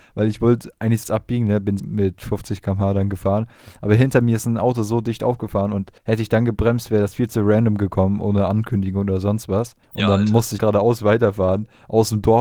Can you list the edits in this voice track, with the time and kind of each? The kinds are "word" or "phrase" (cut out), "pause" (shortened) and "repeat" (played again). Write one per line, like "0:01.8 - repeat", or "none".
0:01.0 - phrase
0:01.8 - word
0:06.0 - pause
0:09.8 - pause
0:10.6 - word